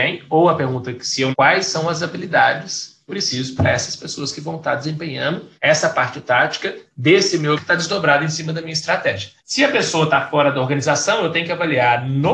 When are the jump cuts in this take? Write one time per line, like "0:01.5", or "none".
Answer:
0:01.3
0:03.1
0:05.6
0:07.6
0:09.4